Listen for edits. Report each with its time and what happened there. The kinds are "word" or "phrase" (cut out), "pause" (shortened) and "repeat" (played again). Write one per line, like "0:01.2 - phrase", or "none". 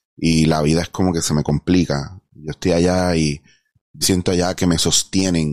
0:04.0 - word